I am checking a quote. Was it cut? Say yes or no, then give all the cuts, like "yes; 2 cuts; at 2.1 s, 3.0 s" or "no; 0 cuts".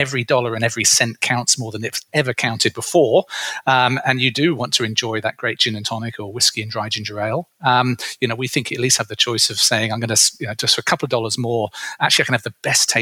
no; 0 cuts